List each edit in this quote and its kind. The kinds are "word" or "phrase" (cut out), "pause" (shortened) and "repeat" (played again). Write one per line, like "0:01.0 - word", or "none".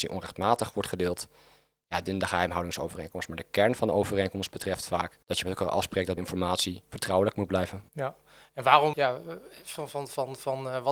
0:02.1 - phrase
0:05.2 - pause
0:06.2 - word
0:07.9 - pause
0:08.9 - word